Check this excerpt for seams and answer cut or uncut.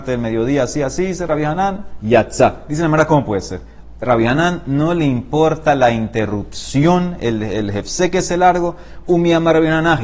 cut